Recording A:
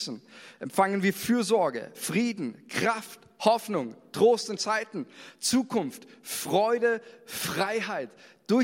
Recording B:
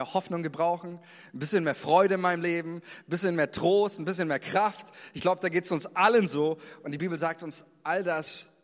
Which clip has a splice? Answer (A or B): A